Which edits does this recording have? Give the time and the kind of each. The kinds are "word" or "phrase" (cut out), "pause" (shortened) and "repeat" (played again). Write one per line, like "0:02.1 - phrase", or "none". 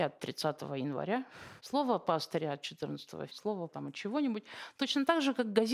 0:01.6 - pause
0:03.3 - word
0:03.7 - word